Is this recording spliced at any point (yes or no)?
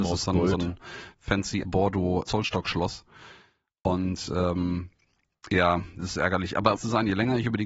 yes